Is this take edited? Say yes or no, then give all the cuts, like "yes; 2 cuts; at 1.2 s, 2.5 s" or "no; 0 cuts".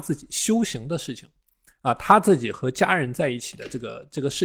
no; 0 cuts